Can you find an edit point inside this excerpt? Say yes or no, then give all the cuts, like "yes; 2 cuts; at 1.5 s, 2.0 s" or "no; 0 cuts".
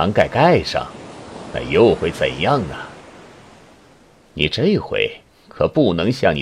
no; 0 cuts